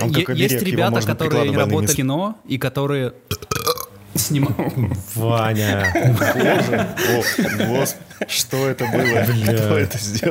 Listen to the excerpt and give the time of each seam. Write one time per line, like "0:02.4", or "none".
0:01.5
0:01.9